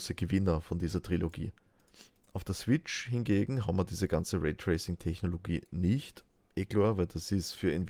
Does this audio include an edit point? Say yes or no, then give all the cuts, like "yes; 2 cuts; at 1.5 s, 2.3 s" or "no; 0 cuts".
no; 0 cuts